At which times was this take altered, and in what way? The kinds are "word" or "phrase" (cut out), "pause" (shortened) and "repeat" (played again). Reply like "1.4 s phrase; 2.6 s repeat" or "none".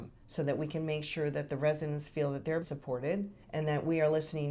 2.6 s word; 3.4 s pause